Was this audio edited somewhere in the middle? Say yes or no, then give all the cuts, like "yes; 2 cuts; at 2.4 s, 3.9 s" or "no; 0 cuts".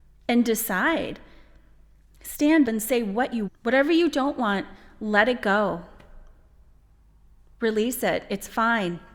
yes; 2 cuts; at 2.6 s, 3.5 s